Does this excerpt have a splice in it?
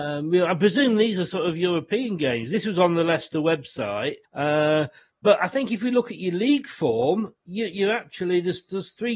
yes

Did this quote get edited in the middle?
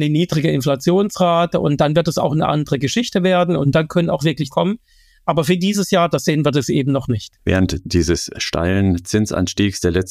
yes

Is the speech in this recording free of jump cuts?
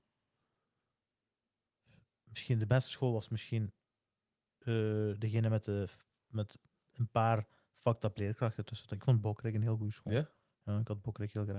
yes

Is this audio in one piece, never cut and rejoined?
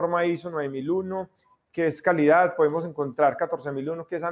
yes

